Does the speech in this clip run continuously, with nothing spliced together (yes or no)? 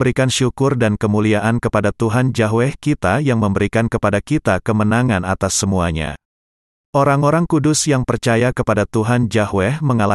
yes